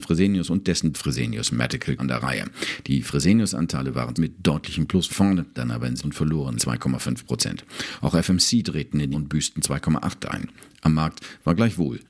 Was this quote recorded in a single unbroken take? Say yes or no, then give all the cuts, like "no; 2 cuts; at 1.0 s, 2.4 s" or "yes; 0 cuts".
no; 9 cuts; at 0.9 s, 2.0 s, 4.1 s, 5.1 s, 5.6 s, 6.0 s, 6.6 s, 9.1 s, 10.2 s